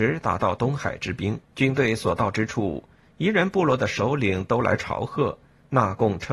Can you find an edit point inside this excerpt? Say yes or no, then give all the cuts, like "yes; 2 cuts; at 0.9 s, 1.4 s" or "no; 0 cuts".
yes; 1 cut; at 1.4 s